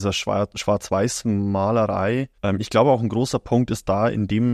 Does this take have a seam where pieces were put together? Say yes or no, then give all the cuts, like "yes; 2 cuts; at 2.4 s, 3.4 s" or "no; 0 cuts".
yes; 1 cut; at 2.4 s